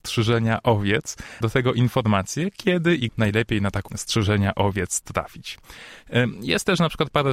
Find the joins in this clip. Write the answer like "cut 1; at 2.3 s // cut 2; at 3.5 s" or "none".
cut 1; at 1.4 s // cut 2; at 3.1 s // cut 3; at 3.9 s

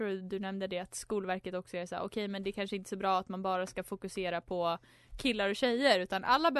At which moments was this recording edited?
none

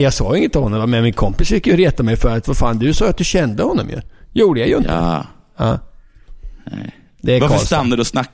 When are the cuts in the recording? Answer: none

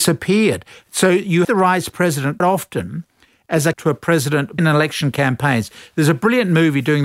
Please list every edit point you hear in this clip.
cut 1; at 1.4 s // cut 2; at 2.4 s // cut 3; at 3.7 s // cut 4; at 4.6 s

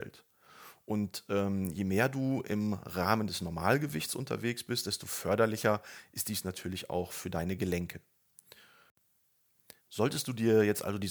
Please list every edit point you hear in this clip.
cut 1; at 9.8 s

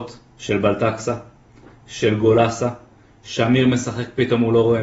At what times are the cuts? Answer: none

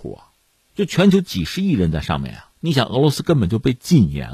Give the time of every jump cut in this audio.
cut 1; at 2.5 s

